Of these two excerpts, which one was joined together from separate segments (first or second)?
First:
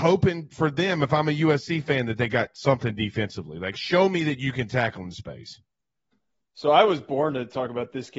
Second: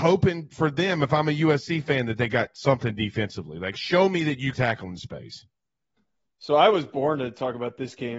second